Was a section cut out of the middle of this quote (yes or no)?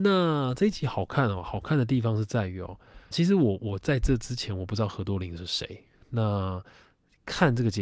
yes